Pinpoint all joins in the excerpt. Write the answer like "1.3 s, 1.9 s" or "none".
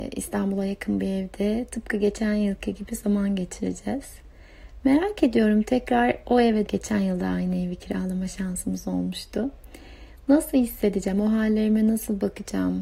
6.7 s